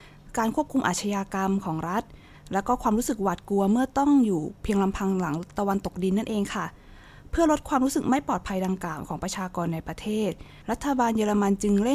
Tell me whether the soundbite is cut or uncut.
cut